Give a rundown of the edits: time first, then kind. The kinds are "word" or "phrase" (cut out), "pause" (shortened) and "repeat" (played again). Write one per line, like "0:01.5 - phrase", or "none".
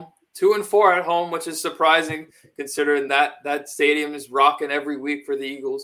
none